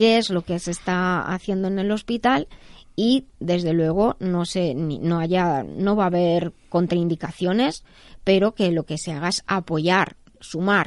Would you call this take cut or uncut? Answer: uncut